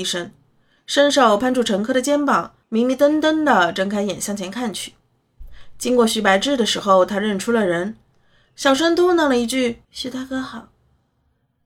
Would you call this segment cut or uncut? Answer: cut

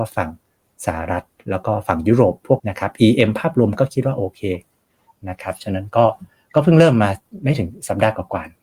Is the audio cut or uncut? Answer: cut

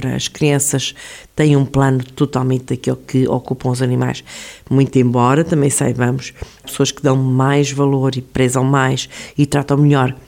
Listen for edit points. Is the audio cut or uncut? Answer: cut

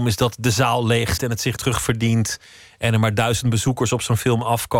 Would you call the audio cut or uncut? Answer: cut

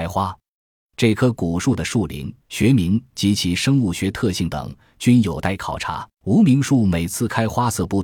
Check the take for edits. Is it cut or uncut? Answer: cut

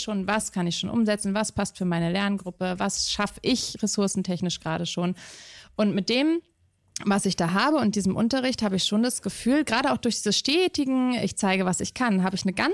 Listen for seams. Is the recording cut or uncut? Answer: uncut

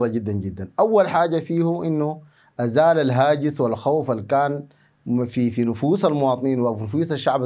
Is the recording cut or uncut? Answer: uncut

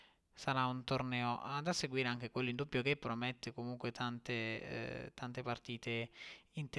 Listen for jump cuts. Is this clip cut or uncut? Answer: uncut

